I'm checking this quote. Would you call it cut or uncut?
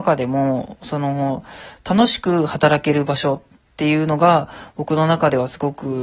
uncut